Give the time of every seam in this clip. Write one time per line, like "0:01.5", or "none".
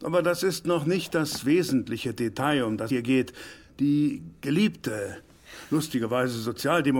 0:02.9